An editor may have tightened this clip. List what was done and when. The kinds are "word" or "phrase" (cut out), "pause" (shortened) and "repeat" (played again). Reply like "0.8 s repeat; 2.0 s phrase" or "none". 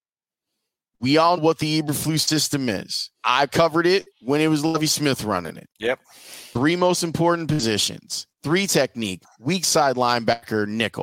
1.4 s word; 3.1 s pause; 4.1 s pause; 6.0 s pause; 8.3 s pause